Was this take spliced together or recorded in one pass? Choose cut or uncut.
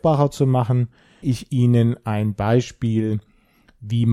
cut